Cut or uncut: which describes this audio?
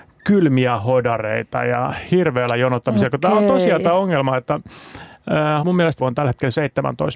cut